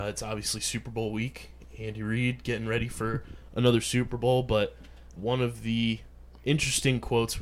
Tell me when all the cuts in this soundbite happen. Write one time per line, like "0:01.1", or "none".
0:05.2

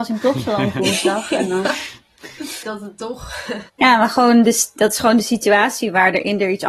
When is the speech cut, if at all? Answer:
0:02.6
0:03.7

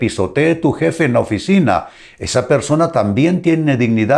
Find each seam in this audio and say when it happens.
none

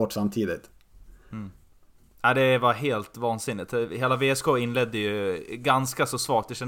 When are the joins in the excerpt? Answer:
none

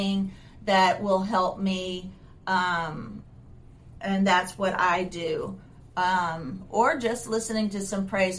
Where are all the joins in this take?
none

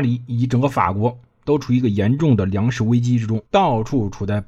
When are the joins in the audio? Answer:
0:03.5

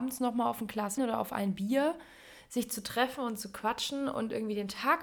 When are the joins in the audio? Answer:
0:01.0

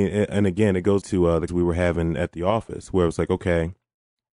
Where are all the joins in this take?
0:01.0
0:01.5

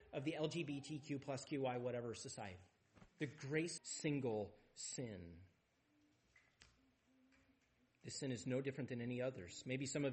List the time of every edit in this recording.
0:03.1
0:03.8

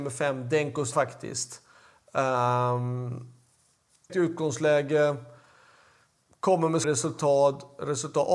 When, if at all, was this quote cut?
0:00.9
0:04.1
0:06.8

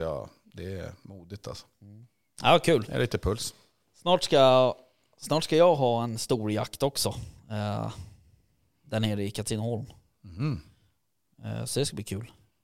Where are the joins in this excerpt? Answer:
none

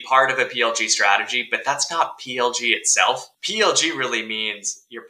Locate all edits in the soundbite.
0:03.3

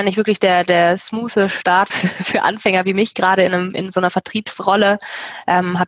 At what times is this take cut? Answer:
0:01.9

